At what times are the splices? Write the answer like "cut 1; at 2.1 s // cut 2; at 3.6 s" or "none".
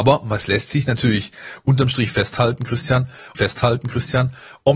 cut 1; at 3.3 s